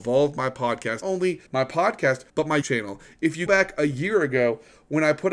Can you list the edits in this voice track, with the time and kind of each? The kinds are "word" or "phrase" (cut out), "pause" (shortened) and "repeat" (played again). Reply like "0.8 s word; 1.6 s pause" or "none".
1.0 s word; 1.5 s pause; 2.3 s pause; 2.6 s word; 3.5 s word